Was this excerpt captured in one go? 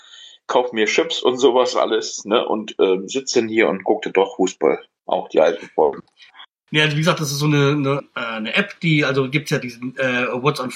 no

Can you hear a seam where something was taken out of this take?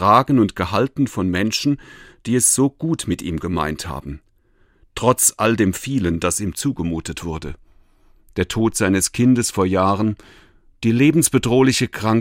no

